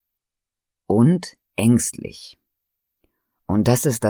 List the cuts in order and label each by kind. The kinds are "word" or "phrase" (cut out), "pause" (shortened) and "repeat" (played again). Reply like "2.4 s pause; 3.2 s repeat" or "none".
1.4 s pause